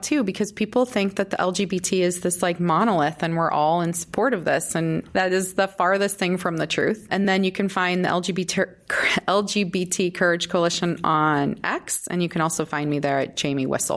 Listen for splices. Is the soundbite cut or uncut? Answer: uncut